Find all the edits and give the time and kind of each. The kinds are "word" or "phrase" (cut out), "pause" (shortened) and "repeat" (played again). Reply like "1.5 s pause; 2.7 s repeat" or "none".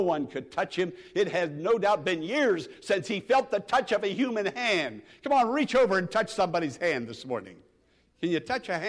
none